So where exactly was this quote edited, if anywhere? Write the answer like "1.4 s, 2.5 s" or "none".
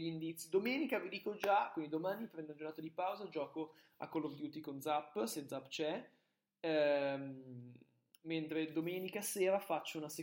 none